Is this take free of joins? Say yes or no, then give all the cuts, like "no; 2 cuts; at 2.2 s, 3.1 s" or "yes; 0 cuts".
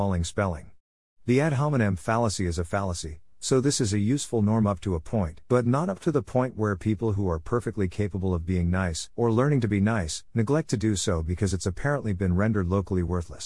no; 3 cuts; at 5.5 s, 9.1 s, 10.3 s